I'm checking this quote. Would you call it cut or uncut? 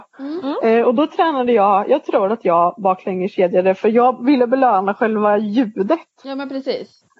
uncut